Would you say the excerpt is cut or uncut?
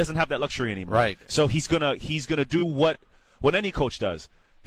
uncut